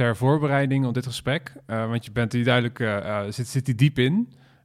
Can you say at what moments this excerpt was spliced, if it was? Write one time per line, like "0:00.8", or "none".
none